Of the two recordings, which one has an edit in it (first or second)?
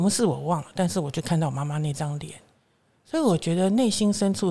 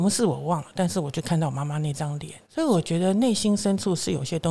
second